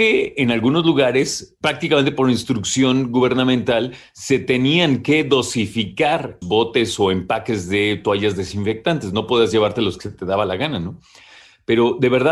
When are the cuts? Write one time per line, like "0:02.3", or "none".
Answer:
0:01.6
0:06.4